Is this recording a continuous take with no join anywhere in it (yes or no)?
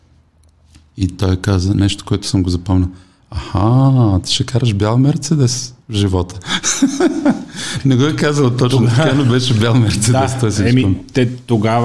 yes